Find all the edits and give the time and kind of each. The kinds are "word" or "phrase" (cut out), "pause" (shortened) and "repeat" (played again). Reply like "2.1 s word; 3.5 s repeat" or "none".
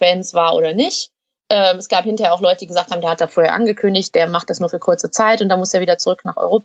none